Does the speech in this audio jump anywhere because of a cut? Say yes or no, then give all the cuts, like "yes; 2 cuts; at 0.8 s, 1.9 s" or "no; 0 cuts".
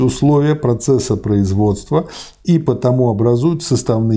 no; 0 cuts